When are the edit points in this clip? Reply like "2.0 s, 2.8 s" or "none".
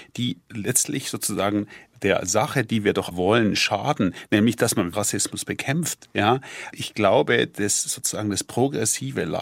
3.1 s, 4.9 s, 6.7 s

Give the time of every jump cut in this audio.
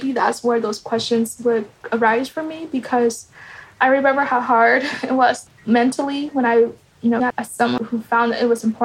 7.2 s

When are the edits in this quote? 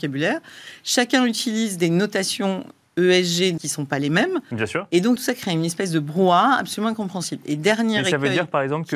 3.6 s, 5.2 s

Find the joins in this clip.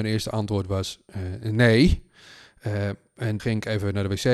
3.4 s

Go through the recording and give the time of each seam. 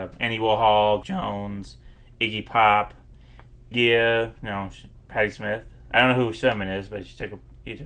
1.0 s, 3.7 s, 6.3 s

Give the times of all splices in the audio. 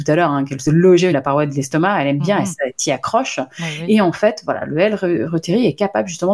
1.1 s

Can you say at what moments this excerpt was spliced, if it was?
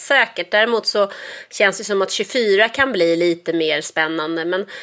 none

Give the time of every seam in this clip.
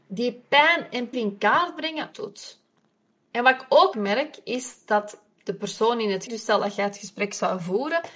1.1 s, 2.1 s, 3.9 s, 6.3 s

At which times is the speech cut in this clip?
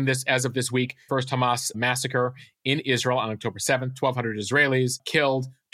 1.1 s, 1.7 s

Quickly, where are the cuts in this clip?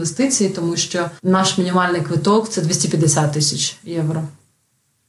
1.2 s

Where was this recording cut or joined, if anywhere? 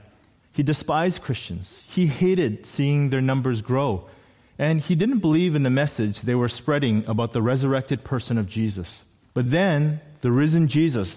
none

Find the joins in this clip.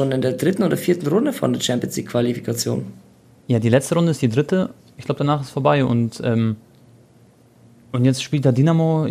none

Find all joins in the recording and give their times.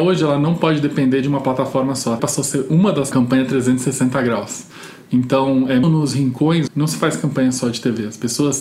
2.2 s, 3.1 s, 5.8 s, 6.7 s

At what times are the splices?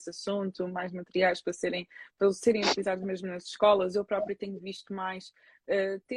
none

